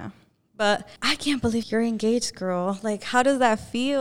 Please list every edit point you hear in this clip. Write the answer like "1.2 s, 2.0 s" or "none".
1.0 s, 1.6 s